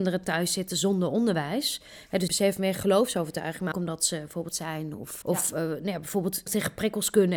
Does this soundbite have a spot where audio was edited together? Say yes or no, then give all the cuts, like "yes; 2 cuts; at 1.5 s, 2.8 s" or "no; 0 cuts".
yes; 5 cuts; at 2.3 s, 3.7 s, 4.5 s, 5.2 s, 6.5 s